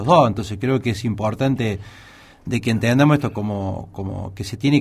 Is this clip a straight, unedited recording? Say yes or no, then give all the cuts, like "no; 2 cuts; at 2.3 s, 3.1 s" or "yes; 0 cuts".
yes; 0 cuts